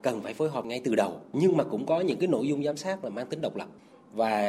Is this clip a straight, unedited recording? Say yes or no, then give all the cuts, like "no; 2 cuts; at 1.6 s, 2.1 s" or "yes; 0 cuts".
yes; 0 cuts